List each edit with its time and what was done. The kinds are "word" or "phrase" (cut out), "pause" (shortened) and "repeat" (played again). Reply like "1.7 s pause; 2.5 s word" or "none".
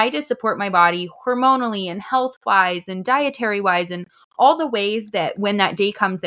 none